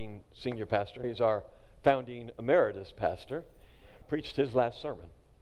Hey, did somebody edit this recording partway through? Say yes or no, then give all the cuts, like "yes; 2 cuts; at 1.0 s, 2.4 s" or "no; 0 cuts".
yes; 2 cuts; at 1.0 s, 4.0 s